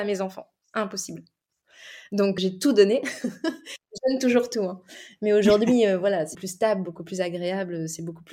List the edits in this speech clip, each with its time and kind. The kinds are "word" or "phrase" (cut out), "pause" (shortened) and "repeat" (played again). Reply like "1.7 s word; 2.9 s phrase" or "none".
2.4 s word; 6.3 s word